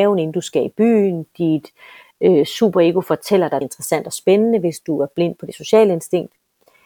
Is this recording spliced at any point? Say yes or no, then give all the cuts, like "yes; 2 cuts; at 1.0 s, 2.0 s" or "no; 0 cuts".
yes; 1 cut; at 3.6 s